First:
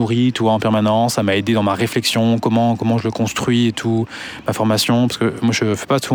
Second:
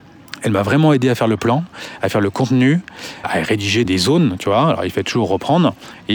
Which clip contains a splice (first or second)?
second